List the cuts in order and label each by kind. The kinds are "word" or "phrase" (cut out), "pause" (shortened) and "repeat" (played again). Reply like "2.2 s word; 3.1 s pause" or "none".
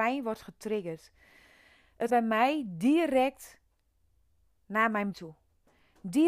2.1 s word; 5.1 s word

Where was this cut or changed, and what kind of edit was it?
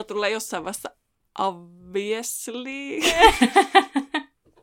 none

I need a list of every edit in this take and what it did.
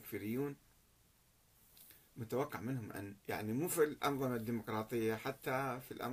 3.2 s pause

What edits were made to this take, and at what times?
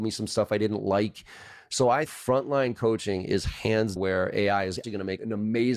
2.1 s word; 4.0 s word; 4.8 s word

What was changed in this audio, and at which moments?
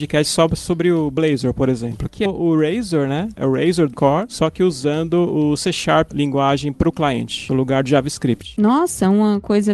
2.3 s word; 3.9 s word; 6.1 s word

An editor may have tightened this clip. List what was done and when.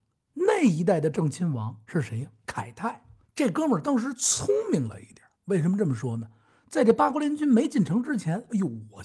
1.8 s pause; 2.4 s pause; 3.2 s pause; 5.3 s pause

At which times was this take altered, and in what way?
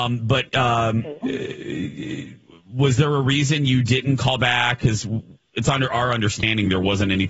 5.4 s pause

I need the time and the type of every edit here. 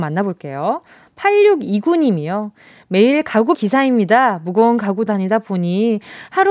3.5 s word; 5.1 s word

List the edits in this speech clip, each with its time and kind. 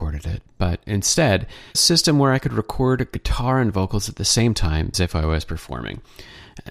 1.7 s phrase; 4.9 s phrase

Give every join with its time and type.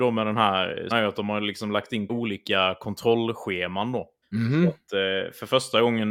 0.9 s word; 2.1 s word; 4.2 s pause

